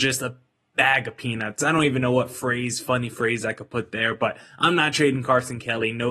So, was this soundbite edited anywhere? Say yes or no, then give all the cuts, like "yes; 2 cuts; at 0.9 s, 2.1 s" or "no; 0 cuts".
no; 0 cuts